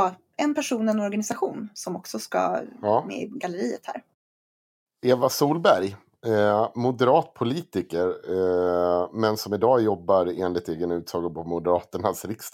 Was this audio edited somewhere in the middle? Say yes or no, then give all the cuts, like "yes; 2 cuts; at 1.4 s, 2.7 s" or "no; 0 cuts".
no; 0 cuts